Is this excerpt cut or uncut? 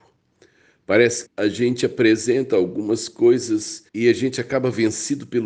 cut